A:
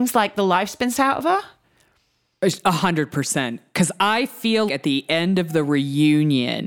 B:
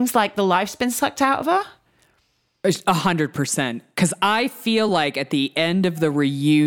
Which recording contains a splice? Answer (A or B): A